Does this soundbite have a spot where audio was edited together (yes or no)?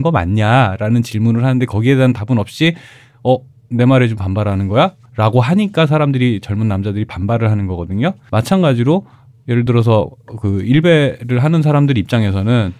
no